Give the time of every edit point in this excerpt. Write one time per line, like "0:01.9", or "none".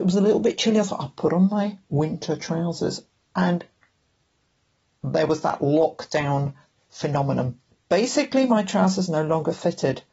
0:07.7